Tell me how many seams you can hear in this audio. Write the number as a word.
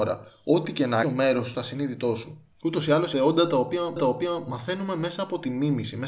five